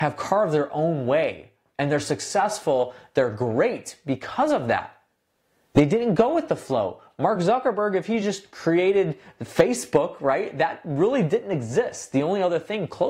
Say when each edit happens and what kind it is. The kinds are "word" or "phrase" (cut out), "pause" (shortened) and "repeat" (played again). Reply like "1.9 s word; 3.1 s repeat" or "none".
none